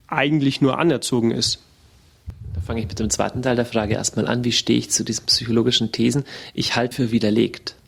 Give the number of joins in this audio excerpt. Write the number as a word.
one